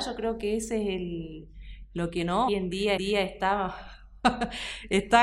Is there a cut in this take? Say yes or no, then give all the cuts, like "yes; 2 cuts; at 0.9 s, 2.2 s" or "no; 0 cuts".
yes; 2 cuts; at 2.5 s, 3.0 s